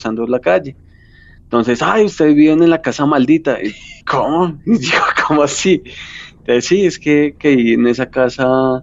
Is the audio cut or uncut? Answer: cut